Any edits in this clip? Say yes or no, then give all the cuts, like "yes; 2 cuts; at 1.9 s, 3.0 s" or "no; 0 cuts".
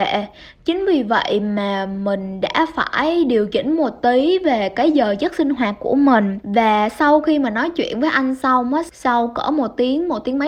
no; 0 cuts